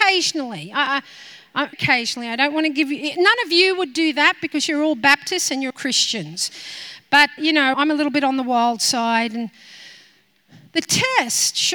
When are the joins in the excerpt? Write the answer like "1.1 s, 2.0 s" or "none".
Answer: 1.7 s, 5.7 s, 7.4 s, 7.7 s